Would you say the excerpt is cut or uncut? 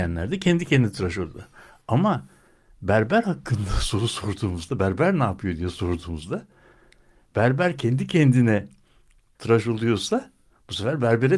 uncut